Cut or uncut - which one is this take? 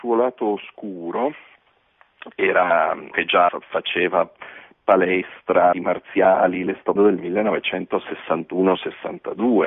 cut